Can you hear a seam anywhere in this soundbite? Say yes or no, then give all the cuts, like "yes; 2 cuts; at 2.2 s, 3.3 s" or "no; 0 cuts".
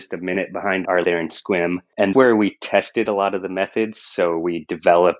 yes; 2 cuts; at 1.0 s, 2.1 s